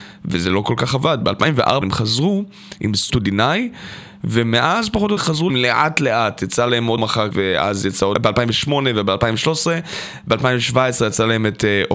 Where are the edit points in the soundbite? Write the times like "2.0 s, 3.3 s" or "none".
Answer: 1.8 s, 3.1 s, 5.2 s, 5.5 s, 7.0 s, 7.3 s, 8.1 s